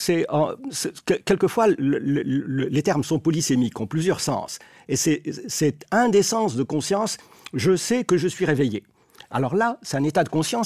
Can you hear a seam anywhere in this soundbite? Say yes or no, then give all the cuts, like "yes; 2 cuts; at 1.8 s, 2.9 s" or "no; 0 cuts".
no; 0 cuts